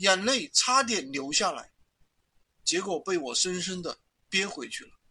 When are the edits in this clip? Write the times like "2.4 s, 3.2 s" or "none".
4.0 s

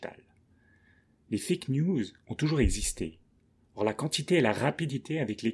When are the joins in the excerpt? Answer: none

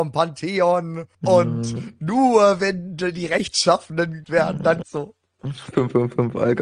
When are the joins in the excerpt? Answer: 1.1 s, 4.2 s, 4.8 s

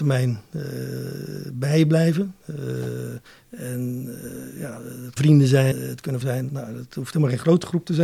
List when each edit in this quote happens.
3.3 s, 5.2 s, 5.7 s, 6.2 s

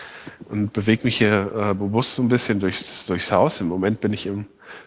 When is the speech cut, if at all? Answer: none

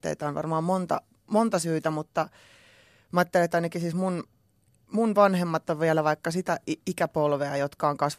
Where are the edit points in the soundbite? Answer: none

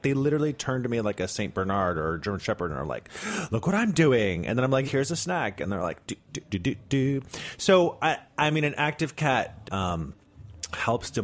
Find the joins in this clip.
4.8 s, 6.5 s, 9.6 s

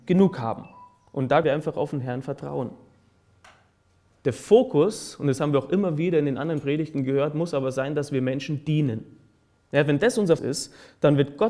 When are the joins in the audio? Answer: 1.4 s, 10.4 s

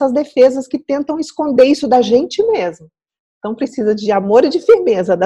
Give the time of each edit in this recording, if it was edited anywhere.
none

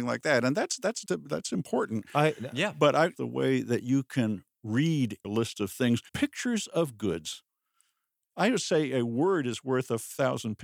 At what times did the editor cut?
1.0 s, 3.2 s, 5.2 s, 6.1 s

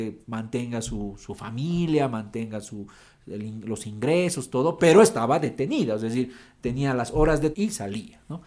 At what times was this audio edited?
7.5 s

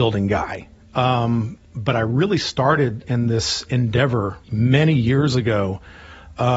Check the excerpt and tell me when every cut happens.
4.4 s

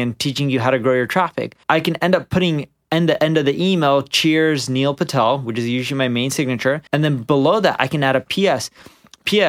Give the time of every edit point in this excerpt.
1.6 s, 6.9 s

